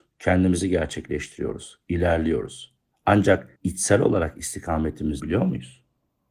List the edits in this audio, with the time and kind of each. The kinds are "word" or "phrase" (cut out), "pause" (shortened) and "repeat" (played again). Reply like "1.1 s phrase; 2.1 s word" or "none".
3.6 s pause; 5.2 s word